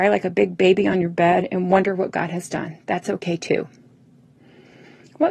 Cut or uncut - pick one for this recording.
uncut